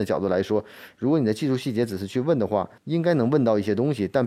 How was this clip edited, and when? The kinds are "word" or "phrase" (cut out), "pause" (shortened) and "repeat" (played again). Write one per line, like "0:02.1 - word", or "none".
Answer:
0:02.8 - pause

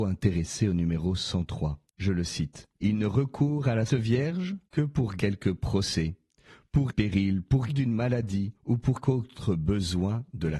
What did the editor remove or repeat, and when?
0:01.9 - pause
0:02.7 - pause
0:03.9 - word
0:04.7 - pause
0:05.2 - word
0:06.9 - phrase
0:07.7 - word
0:08.6 - pause
0:09.0 - word

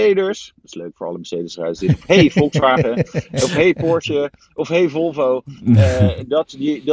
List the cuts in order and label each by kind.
none

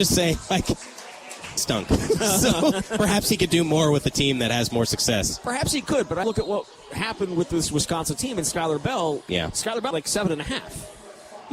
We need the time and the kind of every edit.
0:01.6 - word
0:06.2 - word
0:09.9 - phrase

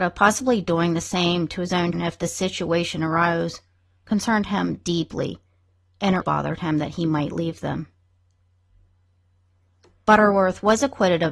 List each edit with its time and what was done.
0:01.9 - word
0:06.2 - word

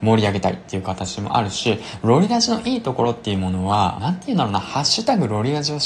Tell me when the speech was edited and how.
0:04.0 - phrase

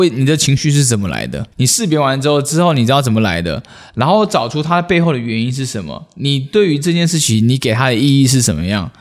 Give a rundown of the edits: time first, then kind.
0:01.5 - pause

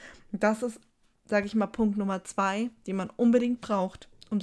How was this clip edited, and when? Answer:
none

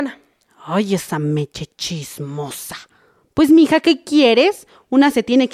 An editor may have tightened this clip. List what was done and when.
none

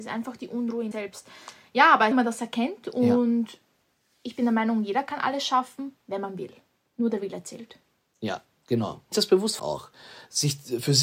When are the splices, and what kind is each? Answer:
0:00.9 - word
0:02.1 - phrase
0:09.1 - word
0:09.6 - word

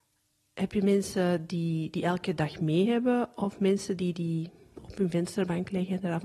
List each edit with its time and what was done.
none

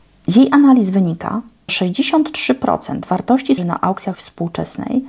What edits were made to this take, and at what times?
0:01.7 - word
0:03.6 - word
0:04.1 - word

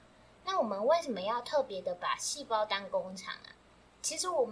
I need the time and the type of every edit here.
none

